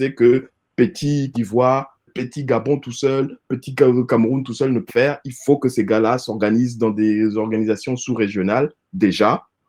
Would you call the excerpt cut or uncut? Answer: cut